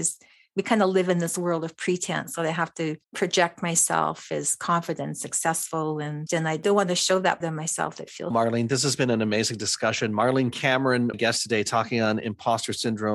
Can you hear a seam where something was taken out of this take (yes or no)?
yes